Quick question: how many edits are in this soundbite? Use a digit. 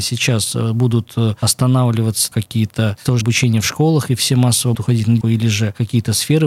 4